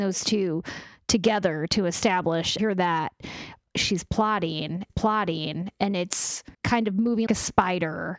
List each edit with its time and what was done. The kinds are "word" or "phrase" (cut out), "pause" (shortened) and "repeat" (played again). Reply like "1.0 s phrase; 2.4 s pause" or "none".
2.6 s phrase; 4.9 s repeat; 6.5 s pause; 7.3 s word